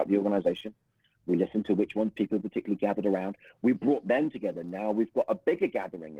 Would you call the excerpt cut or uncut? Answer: uncut